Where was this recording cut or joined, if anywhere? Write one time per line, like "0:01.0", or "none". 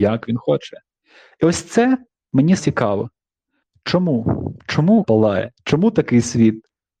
0:02.6
0:05.0
0:05.5